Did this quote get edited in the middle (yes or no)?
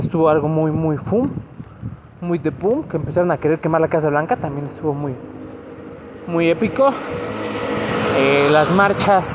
no